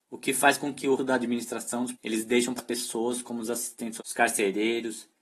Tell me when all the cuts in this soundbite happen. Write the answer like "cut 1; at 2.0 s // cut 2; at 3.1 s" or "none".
cut 1; at 1.0 s // cut 2; at 1.9 s // cut 3; at 2.6 s // cut 4; at 4.0 s